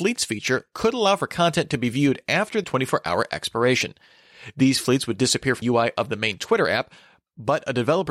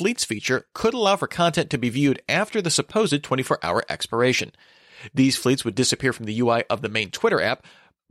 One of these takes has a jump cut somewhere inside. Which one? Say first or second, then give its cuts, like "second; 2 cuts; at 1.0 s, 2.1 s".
first; 2 cuts; at 2.6 s, 5.6 s